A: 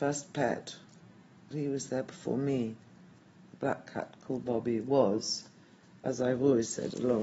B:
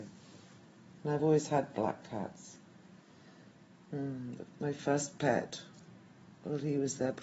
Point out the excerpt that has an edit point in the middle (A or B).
A